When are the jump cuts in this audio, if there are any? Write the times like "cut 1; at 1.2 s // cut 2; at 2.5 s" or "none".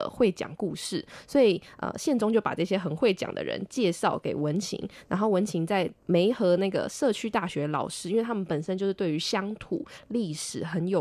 none